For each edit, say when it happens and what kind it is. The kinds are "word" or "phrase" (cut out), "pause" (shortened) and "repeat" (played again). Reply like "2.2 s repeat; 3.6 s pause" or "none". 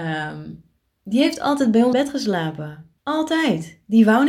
1.9 s word; 3.0 s pause

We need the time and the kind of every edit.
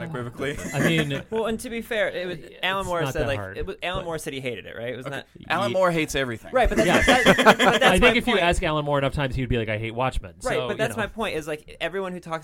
none

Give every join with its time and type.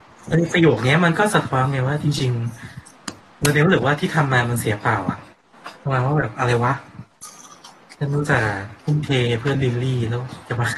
5.8 s pause; 8.8 s pause

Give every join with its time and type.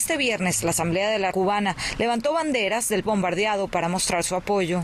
1.3 s word; 3.0 s word

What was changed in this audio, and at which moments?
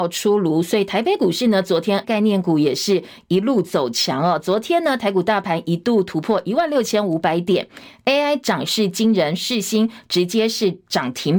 2.0 s word

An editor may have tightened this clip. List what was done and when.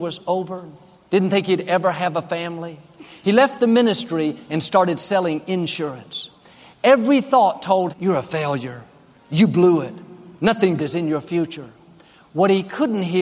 7.9 s word; 10.8 s word

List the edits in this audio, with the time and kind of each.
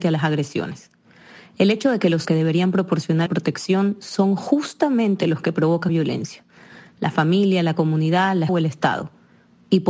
2.2 s word; 3.3 s word; 5.9 s word; 8.5 s word

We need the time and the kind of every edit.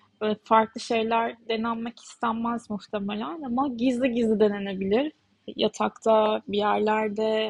none

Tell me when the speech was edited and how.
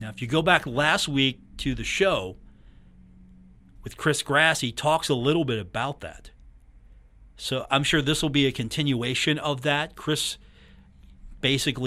none

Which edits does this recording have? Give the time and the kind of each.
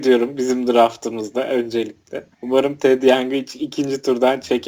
2.3 s pause

